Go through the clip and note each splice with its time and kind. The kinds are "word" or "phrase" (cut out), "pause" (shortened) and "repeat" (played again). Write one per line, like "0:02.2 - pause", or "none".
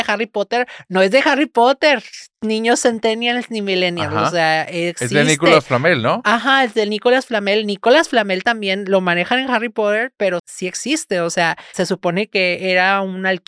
0:10.4 - word
0:11.7 - word

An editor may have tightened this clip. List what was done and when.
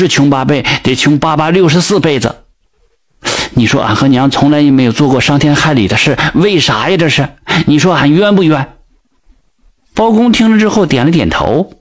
none

